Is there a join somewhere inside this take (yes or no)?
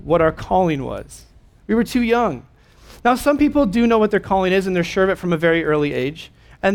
no